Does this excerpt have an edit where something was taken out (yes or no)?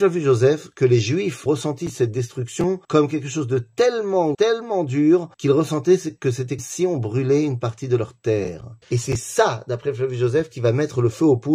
yes